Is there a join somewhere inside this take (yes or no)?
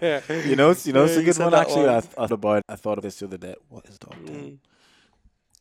yes